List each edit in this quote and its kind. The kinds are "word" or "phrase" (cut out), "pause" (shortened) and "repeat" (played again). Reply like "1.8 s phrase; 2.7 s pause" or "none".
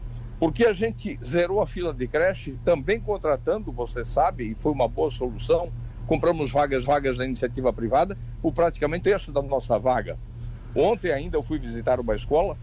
6.8 s repeat; 9.0 s word